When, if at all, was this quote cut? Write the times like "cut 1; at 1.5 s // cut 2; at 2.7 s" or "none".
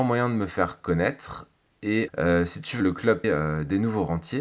cut 1; at 2.1 s // cut 2; at 2.8 s // cut 3; at 3.2 s